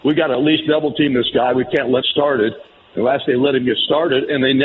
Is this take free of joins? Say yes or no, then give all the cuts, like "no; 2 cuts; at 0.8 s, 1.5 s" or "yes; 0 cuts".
no; 2 cuts; at 2.0 s, 3.3 s